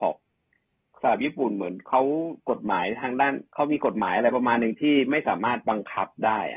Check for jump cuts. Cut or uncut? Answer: cut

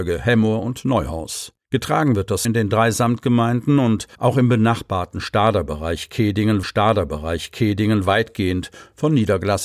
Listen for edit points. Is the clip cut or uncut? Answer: cut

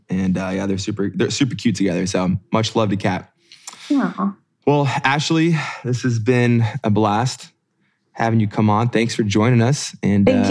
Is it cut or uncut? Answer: uncut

